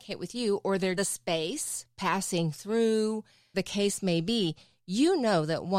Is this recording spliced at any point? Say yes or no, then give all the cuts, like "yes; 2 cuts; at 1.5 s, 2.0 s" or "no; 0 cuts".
yes; 2 cuts; at 1.0 s, 3.5 s